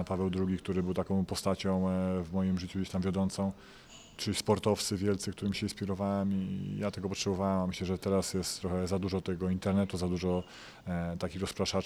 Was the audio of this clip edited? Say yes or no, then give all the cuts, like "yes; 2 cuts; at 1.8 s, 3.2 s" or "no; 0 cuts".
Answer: no; 0 cuts